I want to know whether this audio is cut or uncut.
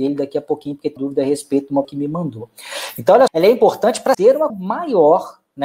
cut